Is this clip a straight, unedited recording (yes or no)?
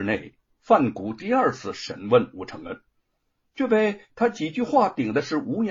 yes